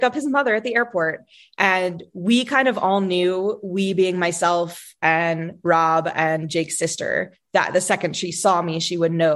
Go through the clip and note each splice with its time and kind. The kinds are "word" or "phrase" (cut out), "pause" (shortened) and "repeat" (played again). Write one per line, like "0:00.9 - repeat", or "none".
none